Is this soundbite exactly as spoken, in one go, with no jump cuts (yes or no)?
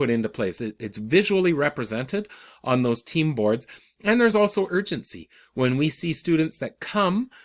yes